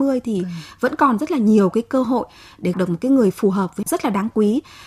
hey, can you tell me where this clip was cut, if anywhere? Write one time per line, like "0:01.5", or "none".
0:02.7
0:03.8